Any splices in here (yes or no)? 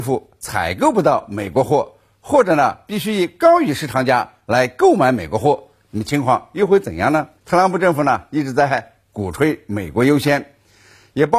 yes